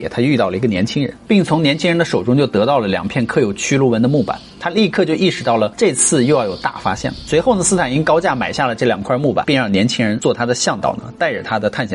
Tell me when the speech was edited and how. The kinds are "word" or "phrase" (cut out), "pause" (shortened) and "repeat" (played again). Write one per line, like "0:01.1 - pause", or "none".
0:09.4 - word